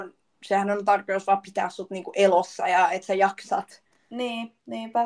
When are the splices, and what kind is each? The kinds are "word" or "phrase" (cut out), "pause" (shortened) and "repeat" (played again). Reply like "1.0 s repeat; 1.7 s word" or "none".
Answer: none